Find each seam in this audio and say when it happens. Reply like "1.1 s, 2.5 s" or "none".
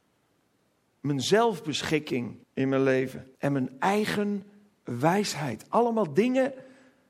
2.4 s, 3.3 s